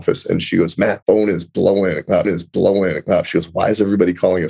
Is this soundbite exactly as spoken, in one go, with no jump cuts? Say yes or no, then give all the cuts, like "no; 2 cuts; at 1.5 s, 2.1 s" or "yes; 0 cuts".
no; 2 cuts; at 1.0 s, 2.2 s